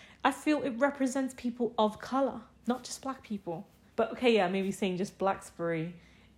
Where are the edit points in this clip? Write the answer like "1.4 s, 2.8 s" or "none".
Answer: 2.5 s, 3.9 s